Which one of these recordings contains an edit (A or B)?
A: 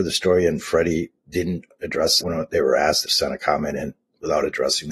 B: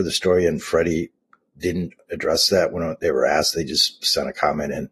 A